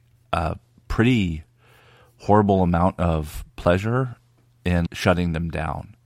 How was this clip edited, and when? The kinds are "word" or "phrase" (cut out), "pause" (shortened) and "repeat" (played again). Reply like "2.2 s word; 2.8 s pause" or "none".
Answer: 4.9 s word